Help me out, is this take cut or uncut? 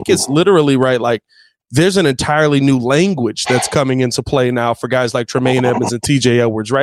uncut